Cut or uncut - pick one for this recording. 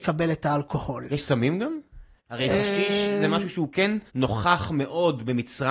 cut